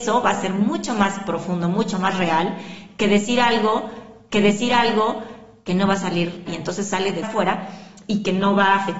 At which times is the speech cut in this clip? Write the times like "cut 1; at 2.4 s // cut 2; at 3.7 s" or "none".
cut 1; at 4.3 s // cut 2; at 6.5 s // cut 3; at 7.2 s